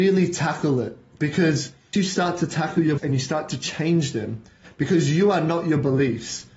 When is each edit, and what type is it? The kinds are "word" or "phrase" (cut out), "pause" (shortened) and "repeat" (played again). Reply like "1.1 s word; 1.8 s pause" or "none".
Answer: 1.9 s word; 3.0 s word